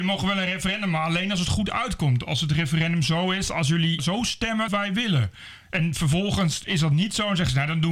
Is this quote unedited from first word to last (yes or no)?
no